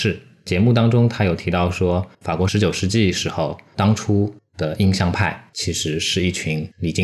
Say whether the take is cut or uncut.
cut